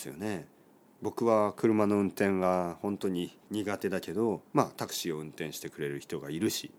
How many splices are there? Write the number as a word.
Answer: two